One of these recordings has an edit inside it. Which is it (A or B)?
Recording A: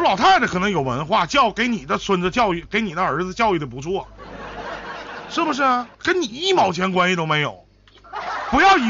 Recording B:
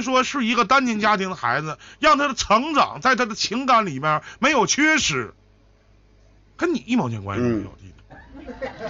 A